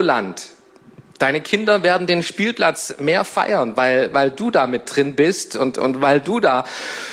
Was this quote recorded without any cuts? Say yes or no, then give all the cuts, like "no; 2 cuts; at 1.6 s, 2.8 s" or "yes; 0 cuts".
no; 1 cut; at 1.1 s